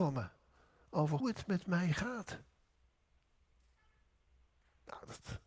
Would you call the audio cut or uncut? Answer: cut